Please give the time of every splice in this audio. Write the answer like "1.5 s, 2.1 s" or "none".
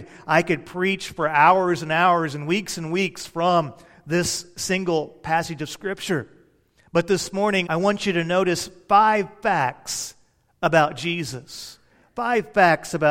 7.7 s